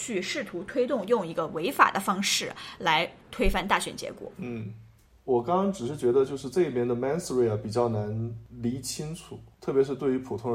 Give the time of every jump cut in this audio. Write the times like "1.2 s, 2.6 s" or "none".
4.3 s